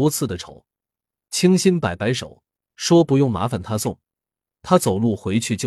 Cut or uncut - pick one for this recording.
uncut